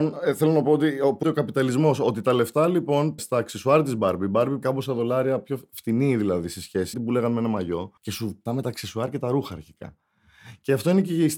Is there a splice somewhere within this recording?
yes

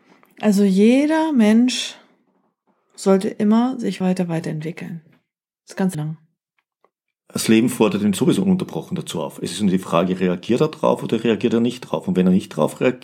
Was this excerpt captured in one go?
no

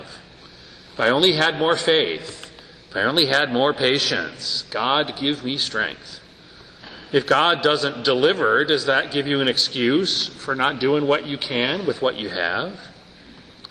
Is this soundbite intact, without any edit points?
yes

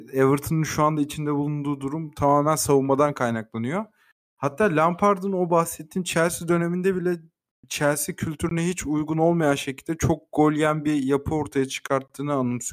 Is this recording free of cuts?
yes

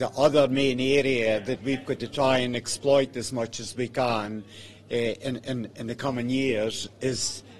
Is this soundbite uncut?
yes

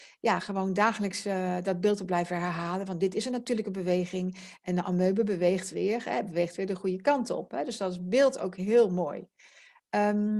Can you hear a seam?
no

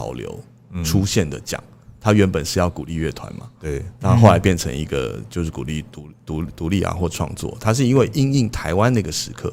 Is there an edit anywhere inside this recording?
no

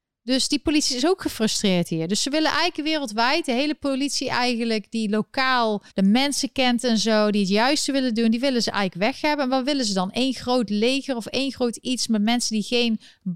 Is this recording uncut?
no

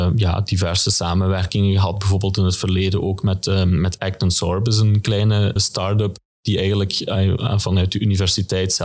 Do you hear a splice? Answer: yes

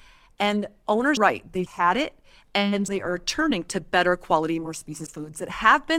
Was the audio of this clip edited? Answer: yes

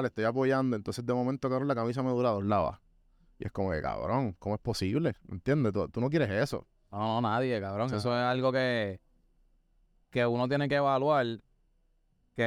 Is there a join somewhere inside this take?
no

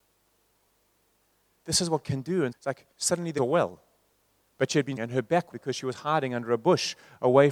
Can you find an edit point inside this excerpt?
yes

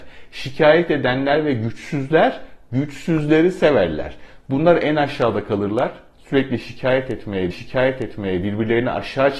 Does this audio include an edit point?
yes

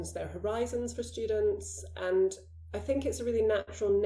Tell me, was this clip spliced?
no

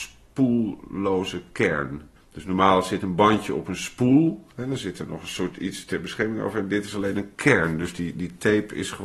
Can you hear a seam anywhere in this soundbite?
yes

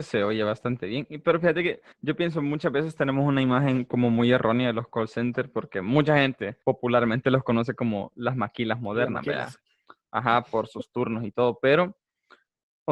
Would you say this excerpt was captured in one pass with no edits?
no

